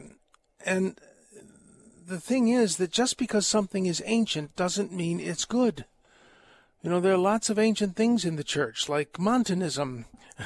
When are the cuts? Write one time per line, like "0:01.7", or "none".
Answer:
none